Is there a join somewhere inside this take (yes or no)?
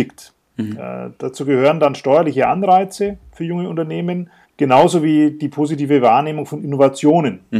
yes